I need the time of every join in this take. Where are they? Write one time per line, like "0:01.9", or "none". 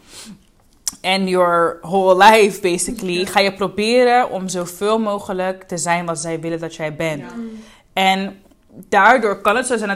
none